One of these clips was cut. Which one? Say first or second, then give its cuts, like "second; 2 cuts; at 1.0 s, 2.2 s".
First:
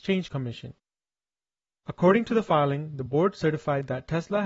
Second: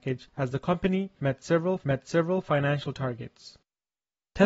second; 1 cut; at 1.8 s